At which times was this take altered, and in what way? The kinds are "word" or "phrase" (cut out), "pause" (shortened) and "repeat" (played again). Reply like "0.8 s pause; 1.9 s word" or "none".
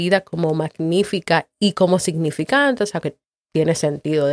3.0 s word